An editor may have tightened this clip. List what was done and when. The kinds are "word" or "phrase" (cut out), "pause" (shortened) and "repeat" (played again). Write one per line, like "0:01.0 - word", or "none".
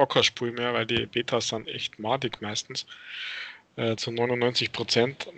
0:01.6 - word